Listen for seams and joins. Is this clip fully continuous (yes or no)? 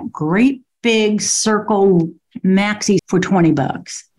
no